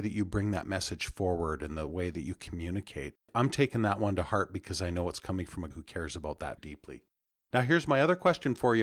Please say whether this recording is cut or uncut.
cut